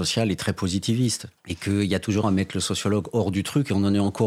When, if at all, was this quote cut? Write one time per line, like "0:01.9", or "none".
0:01.4
0:02.2